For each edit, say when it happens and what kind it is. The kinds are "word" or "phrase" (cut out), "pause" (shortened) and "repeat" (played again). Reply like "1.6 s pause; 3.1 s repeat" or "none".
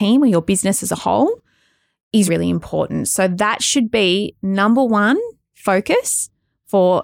2.3 s word

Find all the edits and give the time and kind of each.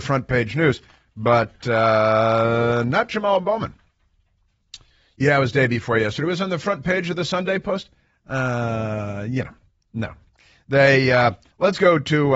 none

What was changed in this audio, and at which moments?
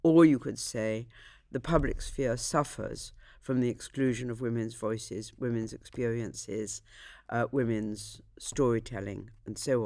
none

